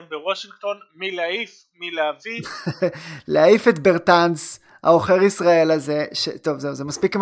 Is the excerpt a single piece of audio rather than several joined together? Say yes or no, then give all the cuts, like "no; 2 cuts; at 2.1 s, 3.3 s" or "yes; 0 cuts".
yes; 0 cuts